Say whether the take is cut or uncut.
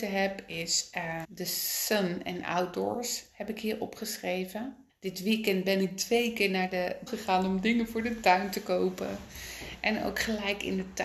cut